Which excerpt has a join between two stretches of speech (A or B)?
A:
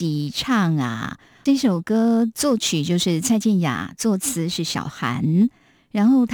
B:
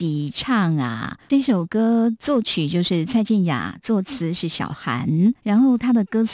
B